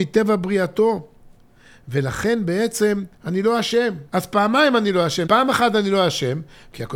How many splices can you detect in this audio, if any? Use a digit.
2